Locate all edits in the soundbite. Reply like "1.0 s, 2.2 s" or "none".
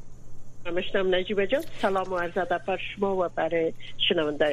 none